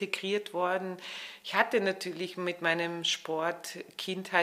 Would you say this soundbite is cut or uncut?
uncut